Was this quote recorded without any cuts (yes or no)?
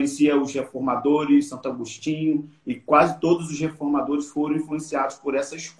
yes